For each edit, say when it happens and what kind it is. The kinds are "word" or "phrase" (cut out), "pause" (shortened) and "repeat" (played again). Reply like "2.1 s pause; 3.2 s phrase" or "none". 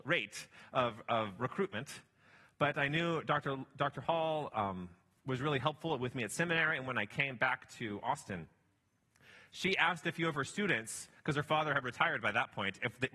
none